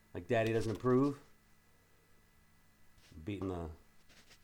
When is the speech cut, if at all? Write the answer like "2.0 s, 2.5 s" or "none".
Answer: 3.4 s